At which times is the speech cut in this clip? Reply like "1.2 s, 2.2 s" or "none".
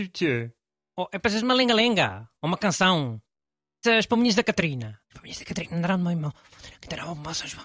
3.8 s, 5.0 s